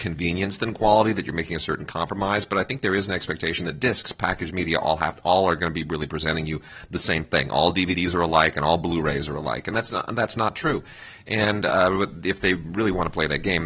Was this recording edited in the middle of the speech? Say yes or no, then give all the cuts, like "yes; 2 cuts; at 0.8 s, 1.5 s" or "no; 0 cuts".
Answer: no; 0 cuts